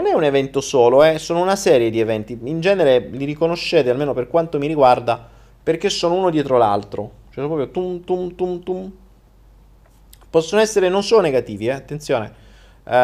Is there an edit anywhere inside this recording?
no; 0 cuts

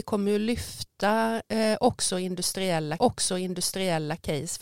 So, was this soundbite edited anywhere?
yes; 1 cut; at 3.0 s

